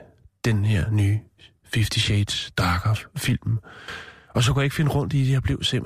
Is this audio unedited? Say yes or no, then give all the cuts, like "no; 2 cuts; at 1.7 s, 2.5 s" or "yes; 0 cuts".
yes; 0 cuts